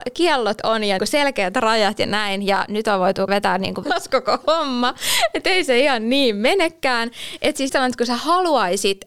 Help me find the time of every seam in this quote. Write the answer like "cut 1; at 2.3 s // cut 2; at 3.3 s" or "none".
cut 1; at 1.0 s // cut 2; at 3.3 s // cut 3; at 3.8 s // cut 4; at 7.7 s

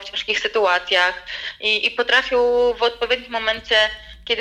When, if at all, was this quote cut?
none

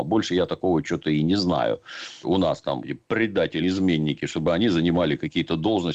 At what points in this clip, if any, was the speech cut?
cut 1; at 2.2 s // cut 2; at 2.8 s // cut 3; at 3.6 s

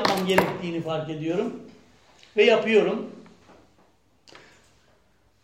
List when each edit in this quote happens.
none

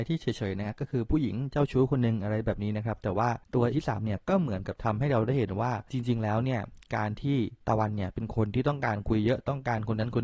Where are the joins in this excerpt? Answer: cut 1; at 3.7 s

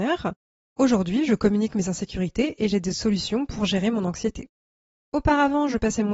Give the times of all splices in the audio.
none

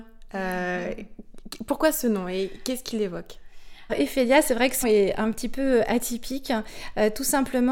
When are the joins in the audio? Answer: cut 1; at 3.9 s // cut 2; at 4.8 s

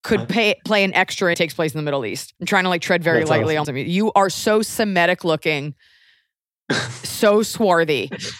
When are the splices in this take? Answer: cut 1; at 1.3 s // cut 2; at 2.4 s // cut 3; at 3.6 s

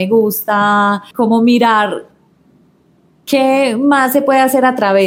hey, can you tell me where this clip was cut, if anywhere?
cut 1; at 1.1 s

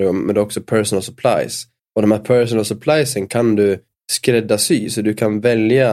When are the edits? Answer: cut 1; at 1.8 s // cut 2; at 3.9 s

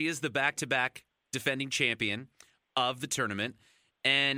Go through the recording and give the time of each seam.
none

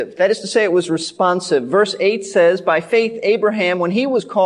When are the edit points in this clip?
none

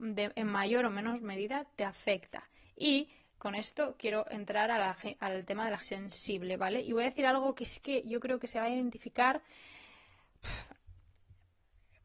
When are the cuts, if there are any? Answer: cut 1; at 5.8 s

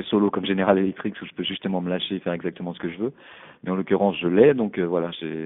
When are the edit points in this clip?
none

